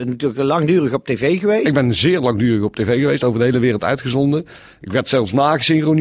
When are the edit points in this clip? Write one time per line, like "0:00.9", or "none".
none